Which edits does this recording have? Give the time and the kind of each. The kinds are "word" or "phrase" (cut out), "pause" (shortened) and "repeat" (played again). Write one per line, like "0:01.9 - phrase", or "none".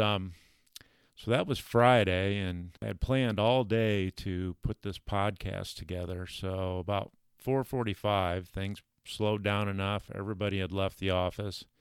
0:02.8 - word